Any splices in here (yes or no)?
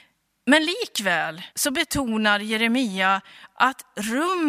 yes